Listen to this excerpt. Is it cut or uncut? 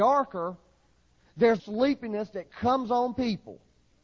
cut